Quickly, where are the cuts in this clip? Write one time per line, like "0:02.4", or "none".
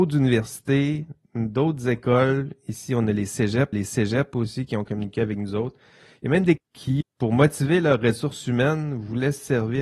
0:03.7
0:06.6
0:07.0

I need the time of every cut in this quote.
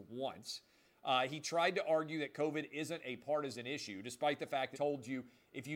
0:04.7

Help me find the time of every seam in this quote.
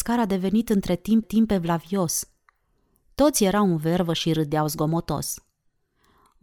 0:01.2

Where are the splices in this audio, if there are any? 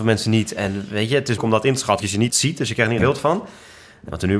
0:01.4
0:02.0
0:02.3
0:03.0

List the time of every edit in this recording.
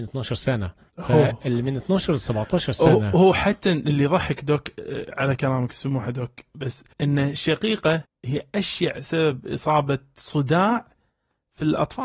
0:06.9
0:08.0

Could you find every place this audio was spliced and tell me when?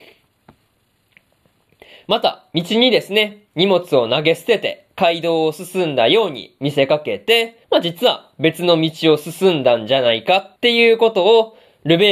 0:07.6
0:10.6

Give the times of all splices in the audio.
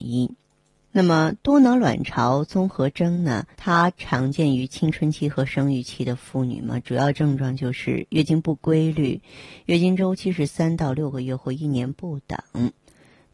0:01.4
0:03.5

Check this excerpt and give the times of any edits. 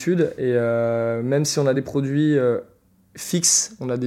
none

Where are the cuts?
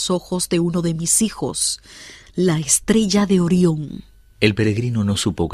none

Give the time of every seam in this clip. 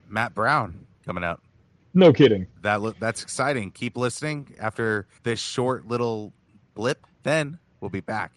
0:00.9
0:01.6
0:02.6
0:05.2
0:07.1

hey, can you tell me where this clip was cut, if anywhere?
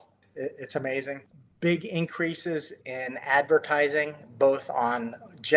0:01.3

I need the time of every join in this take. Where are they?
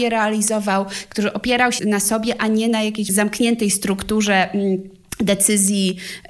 0:01.8
0:03.1

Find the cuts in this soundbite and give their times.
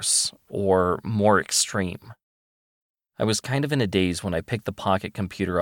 none

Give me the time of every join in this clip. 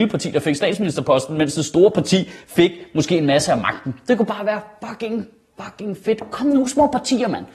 none

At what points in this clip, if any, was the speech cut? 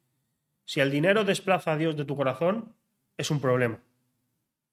none

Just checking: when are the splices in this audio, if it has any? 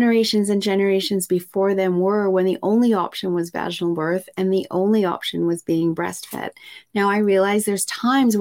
none

